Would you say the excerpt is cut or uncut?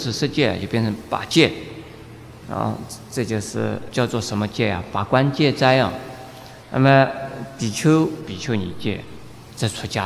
cut